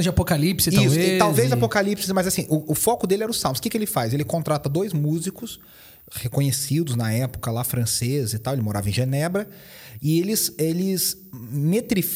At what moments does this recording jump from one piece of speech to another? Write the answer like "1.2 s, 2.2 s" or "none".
none